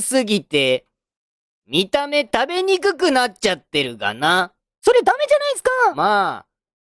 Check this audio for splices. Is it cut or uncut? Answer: uncut